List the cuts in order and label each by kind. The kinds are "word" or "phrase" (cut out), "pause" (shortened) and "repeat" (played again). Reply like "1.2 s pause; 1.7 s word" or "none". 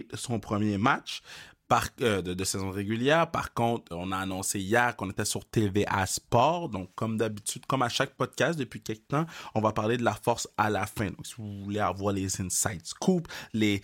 3.9 s word